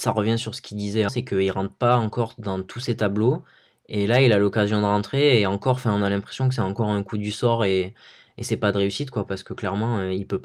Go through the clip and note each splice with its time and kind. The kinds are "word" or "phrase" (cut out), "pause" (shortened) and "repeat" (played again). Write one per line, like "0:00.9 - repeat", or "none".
0:01.1 - word